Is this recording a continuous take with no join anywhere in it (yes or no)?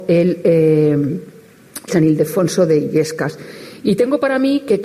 no